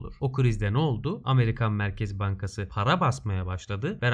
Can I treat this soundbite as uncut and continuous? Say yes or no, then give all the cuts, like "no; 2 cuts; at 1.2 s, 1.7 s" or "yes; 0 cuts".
yes; 0 cuts